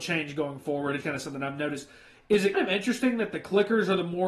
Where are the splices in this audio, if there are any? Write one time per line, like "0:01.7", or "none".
0:01.0
0:02.5